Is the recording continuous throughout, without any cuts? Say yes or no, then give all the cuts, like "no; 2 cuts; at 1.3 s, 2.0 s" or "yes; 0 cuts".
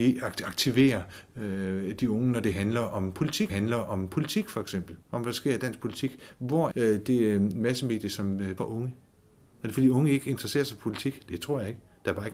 no; 4 cuts; at 3.5 s, 5.0 s, 6.7 s, 8.6 s